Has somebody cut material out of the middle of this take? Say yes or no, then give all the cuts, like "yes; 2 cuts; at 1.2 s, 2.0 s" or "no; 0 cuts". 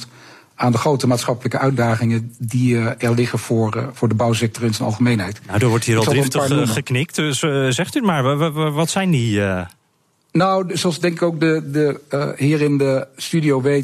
no; 0 cuts